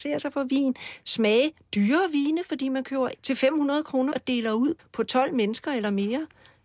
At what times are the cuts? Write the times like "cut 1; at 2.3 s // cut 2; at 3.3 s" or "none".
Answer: cut 1; at 3.1 s // cut 2; at 4.1 s // cut 3; at 4.8 s